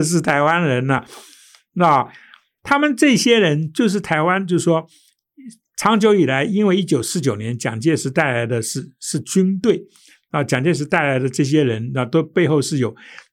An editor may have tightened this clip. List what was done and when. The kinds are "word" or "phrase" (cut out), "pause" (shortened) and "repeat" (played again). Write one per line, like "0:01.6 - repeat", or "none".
none